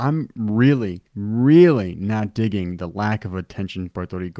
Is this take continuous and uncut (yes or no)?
no